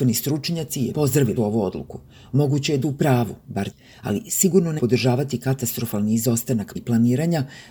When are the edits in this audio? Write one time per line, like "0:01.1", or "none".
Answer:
0:00.9
0:01.4
0:02.8
0:03.7
0:04.8
0:06.8